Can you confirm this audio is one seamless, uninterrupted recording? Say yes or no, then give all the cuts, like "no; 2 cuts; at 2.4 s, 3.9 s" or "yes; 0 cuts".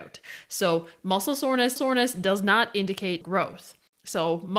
no; 2 cuts; at 1.8 s, 3.2 s